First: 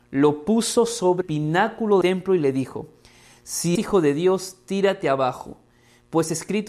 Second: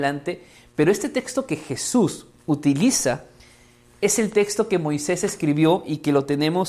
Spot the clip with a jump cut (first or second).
first